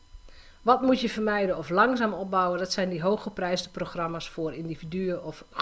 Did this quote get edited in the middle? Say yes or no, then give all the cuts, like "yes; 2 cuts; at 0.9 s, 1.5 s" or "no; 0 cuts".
no; 0 cuts